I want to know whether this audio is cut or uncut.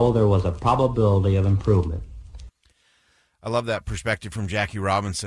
uncut